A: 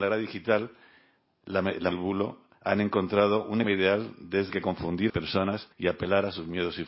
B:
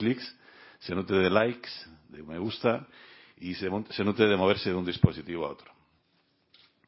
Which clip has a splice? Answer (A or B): A